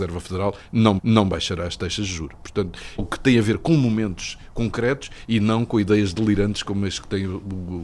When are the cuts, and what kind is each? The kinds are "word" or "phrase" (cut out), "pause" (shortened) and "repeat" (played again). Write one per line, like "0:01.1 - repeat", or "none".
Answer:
0:01.0 - repeat
0:03.0 - phrase